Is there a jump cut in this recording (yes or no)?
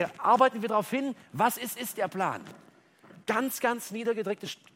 yes